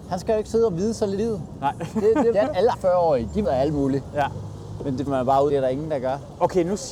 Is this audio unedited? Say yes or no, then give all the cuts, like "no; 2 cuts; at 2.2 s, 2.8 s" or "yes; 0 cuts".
no; 6 cuts; at 1.2 s, 2.3 s, 2.7 s, 3.4 s, 5.1 s, 5.5 s